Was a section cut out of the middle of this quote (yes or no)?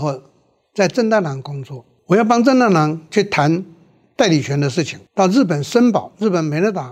yes